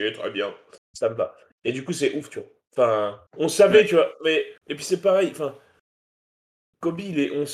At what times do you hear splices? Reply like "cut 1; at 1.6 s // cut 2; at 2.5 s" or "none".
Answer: cut 1; at 3.3 s // cut 2; at 4.6 s